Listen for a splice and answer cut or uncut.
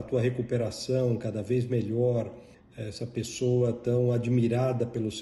cut